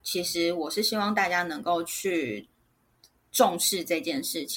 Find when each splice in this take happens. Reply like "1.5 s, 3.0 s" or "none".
none